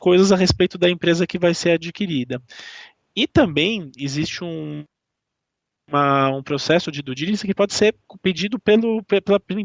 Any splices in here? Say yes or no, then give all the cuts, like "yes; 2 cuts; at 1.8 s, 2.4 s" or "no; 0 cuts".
no; 0 cuts